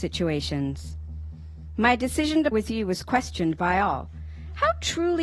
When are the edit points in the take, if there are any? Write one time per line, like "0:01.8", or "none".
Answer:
0:02.5